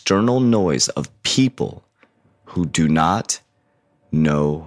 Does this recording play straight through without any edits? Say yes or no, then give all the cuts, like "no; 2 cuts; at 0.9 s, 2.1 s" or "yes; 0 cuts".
yes; 0 cuts